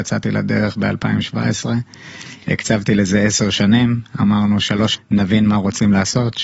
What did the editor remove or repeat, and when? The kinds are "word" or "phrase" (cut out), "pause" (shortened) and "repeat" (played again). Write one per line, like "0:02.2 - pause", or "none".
0:04.9 - word